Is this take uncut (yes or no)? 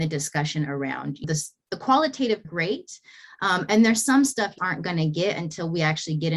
no